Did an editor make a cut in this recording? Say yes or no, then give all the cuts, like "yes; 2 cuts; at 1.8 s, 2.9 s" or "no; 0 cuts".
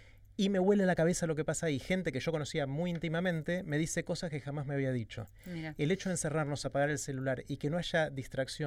no; 0 cuts